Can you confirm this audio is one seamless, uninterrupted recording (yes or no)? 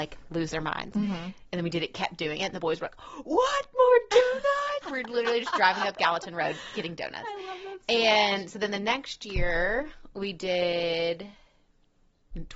no